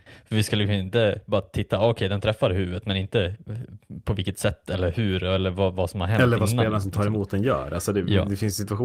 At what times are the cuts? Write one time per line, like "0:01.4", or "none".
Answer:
none

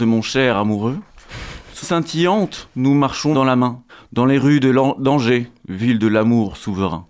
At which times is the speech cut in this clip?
0:01.8
0:03.3
0:03.9

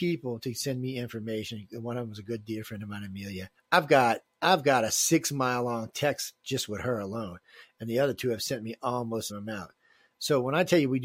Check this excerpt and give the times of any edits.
0:03.6
0:09.3

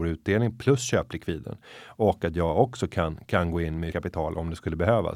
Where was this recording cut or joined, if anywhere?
0:03.9

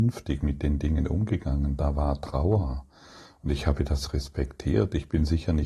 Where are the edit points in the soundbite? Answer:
none

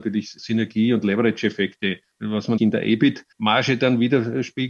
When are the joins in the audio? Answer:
0:02.6

